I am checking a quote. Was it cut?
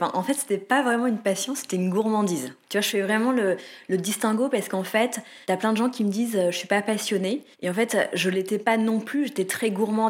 yes; 3 cuts; at 2.6 s, 5.4 s, 7.5 s

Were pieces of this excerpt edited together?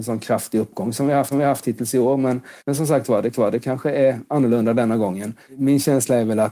yes; 3 cuts; at 1.3 s, 2.6 s, 3.3 s

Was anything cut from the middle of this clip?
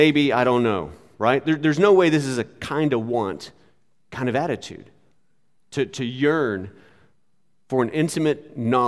no; 0 cuts

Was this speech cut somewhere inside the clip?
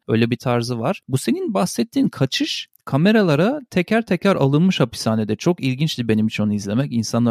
no; 0 cuts

